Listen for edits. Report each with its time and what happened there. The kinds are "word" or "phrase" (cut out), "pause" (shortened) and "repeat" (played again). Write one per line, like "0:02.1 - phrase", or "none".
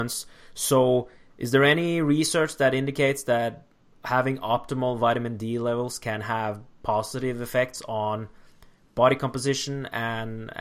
none